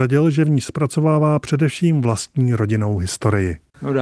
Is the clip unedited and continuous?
yes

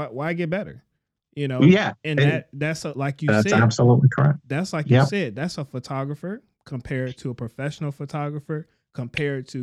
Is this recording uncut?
yes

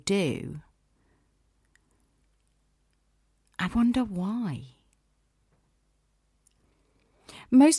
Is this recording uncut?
no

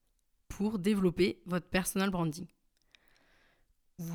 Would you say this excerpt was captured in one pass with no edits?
yes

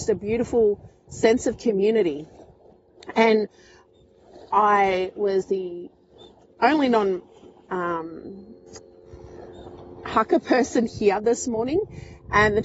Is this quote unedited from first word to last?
yes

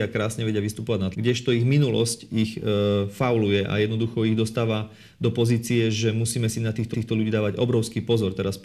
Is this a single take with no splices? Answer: no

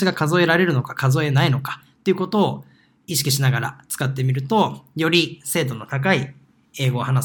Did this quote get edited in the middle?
no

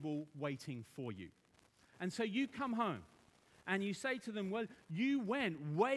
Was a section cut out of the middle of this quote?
no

